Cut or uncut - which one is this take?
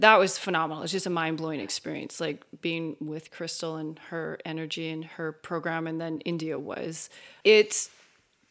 uncut